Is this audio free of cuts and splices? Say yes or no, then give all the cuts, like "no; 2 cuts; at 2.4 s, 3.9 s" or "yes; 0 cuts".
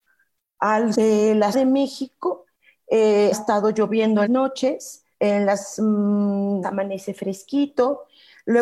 no; 6 cuts; at 0.9 s, 1.5 s, 3.3 s, 4.3 s, 5.1 s, 6.6 s